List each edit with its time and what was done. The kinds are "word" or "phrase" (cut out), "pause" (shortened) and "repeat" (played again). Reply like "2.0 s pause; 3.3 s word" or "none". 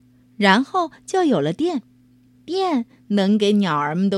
2.3 s pause